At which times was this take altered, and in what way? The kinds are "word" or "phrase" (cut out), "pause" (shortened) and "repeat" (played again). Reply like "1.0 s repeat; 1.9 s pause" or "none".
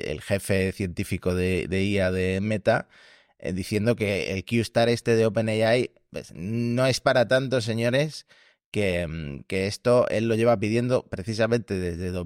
none